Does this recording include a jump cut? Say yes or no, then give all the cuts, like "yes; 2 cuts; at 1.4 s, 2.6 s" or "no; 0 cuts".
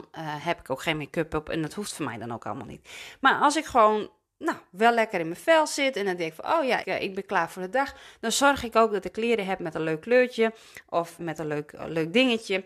yes; 2 cuts; at 6.8 s, 11.2 s